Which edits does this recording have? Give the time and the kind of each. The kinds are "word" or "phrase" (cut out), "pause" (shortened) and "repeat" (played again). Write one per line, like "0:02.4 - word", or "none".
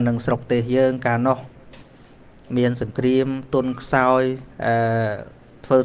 0:02.5 - pause
0:04.5 - pause